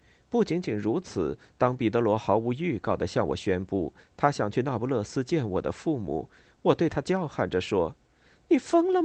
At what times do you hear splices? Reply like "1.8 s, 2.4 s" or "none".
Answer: none